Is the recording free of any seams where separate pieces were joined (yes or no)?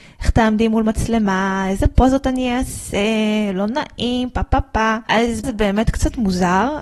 no